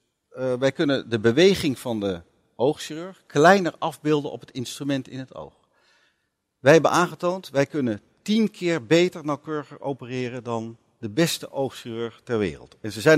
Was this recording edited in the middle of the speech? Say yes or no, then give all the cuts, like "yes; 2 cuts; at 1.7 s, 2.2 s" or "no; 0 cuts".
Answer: no; 0 cuts